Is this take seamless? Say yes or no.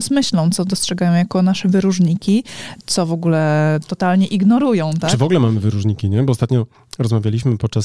yes